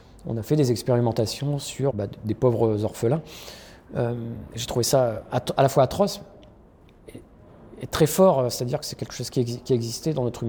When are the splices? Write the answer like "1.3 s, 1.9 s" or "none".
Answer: 1.9 s